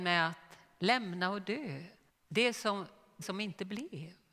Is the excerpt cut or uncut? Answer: cut